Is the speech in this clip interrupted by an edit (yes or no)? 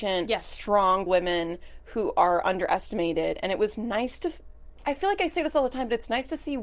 yes